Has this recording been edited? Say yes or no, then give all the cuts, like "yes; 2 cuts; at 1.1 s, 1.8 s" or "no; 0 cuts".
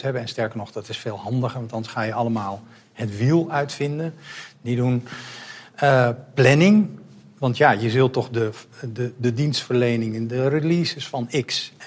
no; 0 cuts